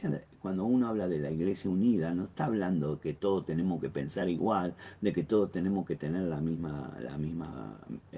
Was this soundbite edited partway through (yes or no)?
no